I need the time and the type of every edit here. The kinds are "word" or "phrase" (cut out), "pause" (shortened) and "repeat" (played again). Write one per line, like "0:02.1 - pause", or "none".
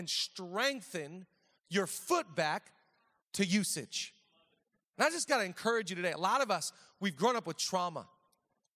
none